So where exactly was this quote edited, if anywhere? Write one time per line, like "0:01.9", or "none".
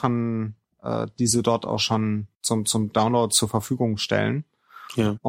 0:02.3